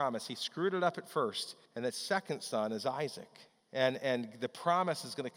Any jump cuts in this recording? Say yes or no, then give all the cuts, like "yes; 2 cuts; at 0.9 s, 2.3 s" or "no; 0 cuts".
yes; 2 cuts; at 1.7 s, 3.5 s